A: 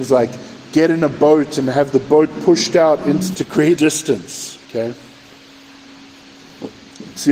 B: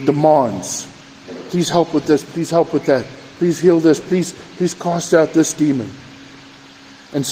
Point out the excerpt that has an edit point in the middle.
A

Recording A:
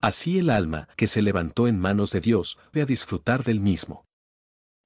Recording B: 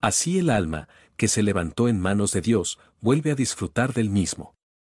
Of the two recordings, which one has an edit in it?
A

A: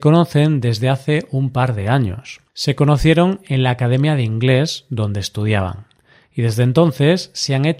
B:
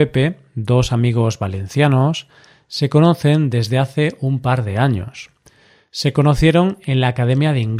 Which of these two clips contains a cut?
A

